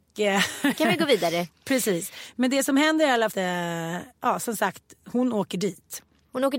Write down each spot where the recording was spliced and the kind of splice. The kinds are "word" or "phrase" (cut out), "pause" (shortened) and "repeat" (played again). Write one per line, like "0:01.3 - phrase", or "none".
0:03.3 - phrase
0:04.1 - pause